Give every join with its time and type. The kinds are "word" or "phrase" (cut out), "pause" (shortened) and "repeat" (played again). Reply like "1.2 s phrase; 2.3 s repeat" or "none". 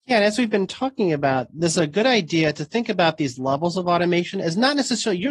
none